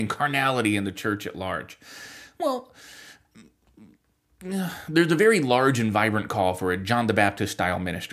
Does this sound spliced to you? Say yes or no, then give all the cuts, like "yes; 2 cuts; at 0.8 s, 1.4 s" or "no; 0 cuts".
no; 0 cuts